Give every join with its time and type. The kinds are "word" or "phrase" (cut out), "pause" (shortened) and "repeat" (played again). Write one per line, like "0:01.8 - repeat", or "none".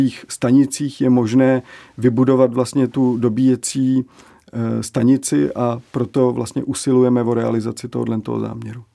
none

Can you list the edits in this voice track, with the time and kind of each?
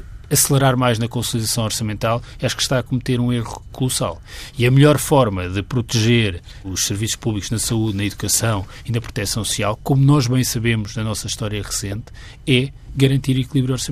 0:03.7 - word
0:06.6 - word

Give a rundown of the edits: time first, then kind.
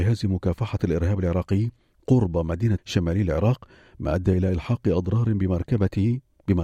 0:02.8 - word

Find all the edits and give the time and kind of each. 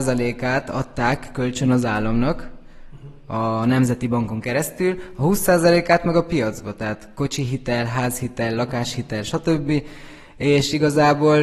none

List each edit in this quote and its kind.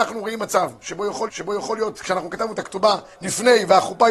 0:01.3 - repeat
0:03.1 - pause

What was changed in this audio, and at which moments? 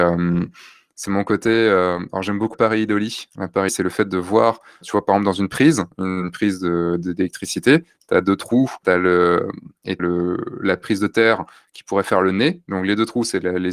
0:02.5 - word
0:03.7 - word
0:04.8 - word
0:08.8 - word
0:10.0 - word

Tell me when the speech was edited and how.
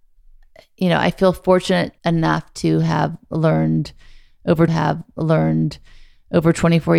0:02.0 - pause
0:04.7 - repeat

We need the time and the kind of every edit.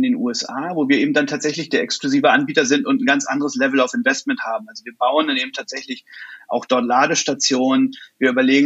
none

